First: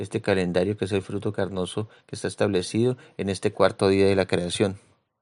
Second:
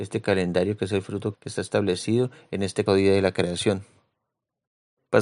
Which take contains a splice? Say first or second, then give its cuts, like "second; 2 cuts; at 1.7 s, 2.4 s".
second; 2 cuts; at 1.3 s, 2.9 s